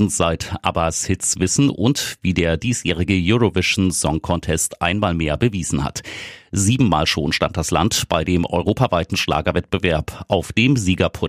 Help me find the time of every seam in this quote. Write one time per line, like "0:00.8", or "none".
none